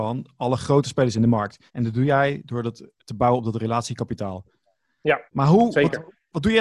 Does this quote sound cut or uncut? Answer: cut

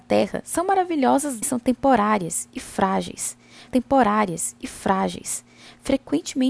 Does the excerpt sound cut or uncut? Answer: cut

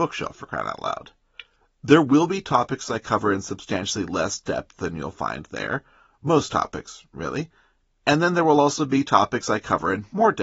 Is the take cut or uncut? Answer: uncut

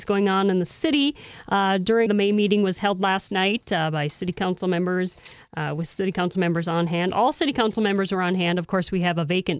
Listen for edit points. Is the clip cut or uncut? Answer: cut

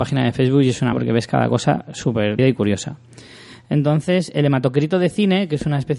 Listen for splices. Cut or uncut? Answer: cut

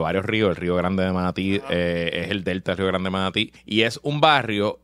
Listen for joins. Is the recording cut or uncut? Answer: cut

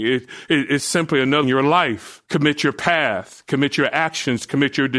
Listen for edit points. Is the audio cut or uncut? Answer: cut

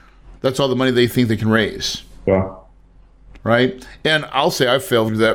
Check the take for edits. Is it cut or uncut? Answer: uncut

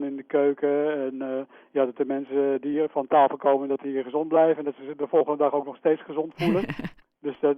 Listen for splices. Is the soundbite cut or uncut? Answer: uncut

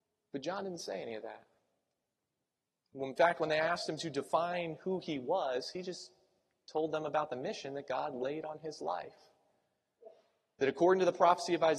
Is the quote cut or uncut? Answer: uncut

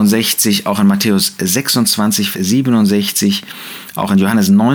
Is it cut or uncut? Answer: cut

